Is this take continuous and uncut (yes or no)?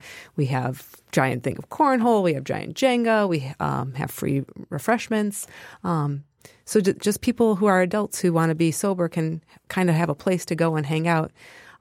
yes